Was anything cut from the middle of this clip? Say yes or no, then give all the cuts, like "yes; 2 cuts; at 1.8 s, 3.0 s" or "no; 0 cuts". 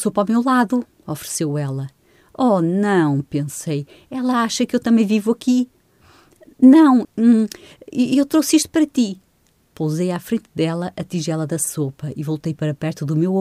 yes; 1 cut; at 7.0 s